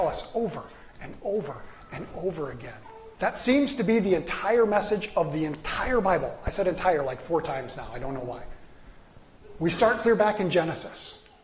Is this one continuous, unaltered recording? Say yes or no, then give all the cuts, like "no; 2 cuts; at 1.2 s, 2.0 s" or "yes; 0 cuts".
no; 1 cut; at 3.1 s